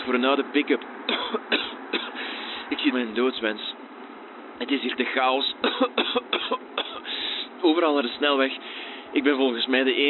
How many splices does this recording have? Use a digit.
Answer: 3